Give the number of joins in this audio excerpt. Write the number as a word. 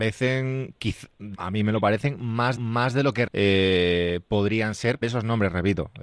four